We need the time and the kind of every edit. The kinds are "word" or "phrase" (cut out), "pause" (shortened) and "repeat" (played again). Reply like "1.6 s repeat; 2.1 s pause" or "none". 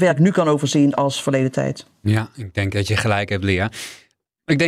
none